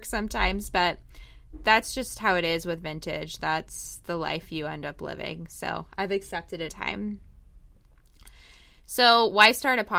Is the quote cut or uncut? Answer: cut